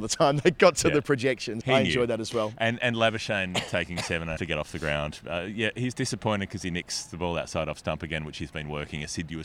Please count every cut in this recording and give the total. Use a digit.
2